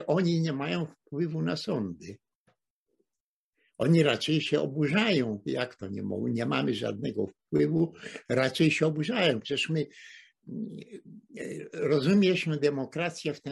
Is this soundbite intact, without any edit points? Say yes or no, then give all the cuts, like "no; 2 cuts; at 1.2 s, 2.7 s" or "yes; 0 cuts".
yes; 0 cuts